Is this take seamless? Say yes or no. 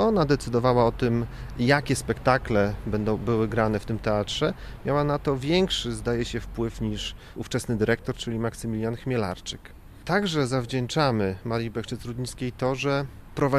yes